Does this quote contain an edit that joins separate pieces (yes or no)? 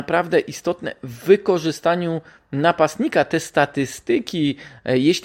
no